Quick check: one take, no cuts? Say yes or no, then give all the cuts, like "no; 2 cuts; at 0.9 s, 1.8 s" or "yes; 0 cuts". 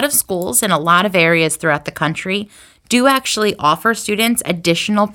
yes; 0 cuts